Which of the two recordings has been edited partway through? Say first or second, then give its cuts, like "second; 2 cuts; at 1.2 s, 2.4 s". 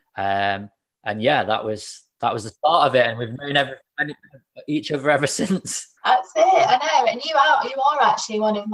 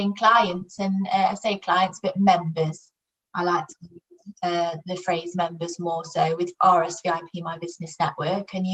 first; 1 cut; at 6.0 s